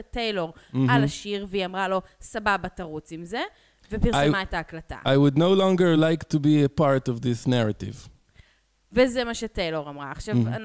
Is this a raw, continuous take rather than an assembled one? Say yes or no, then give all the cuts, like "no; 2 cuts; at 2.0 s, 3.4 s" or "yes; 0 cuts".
yes; 0 cuts